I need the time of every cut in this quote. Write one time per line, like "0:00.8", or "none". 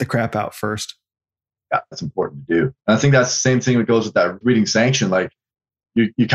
0:01.9
0:02.8
0:04.4